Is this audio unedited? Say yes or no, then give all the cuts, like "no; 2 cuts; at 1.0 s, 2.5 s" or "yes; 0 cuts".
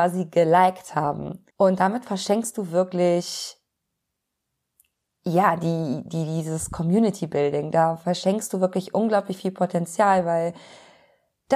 no; 1 cut; at 1.5 s